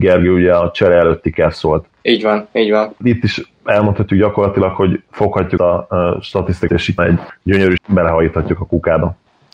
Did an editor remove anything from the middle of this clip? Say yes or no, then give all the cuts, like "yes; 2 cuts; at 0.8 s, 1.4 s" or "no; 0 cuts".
yes; 4 cuts; at 5.6 s, 6.7 s, 7.0 s, 7.8 s